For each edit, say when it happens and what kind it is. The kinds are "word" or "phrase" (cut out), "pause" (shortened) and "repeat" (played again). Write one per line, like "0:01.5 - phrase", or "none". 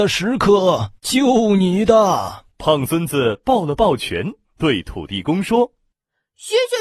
0:01.0 - pause
0:02.5 - pause